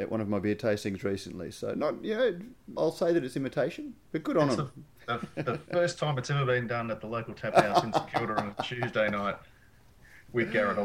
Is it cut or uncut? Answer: cut